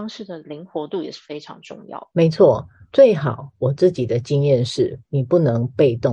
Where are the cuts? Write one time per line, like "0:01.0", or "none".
none